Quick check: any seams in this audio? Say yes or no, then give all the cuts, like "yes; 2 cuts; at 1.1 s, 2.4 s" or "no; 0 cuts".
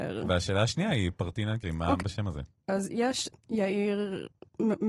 yes; 4 cuts; at 1.6 s, 2.0 s, 2.6 s, 3.3 s